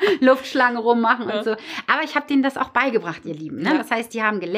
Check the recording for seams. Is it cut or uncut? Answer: uncut